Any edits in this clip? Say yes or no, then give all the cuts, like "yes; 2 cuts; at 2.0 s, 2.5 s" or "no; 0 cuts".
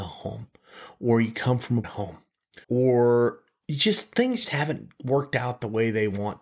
yes; 3 cuts; at 1.8 s, 2.6 s, 4.4 s